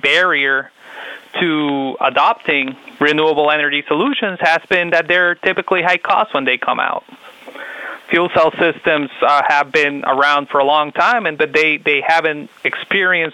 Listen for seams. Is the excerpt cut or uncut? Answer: uncut